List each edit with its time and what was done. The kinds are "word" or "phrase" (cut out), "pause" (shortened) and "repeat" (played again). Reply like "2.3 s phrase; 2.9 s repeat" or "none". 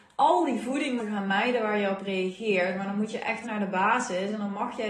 1.0 s word; 3.4 s word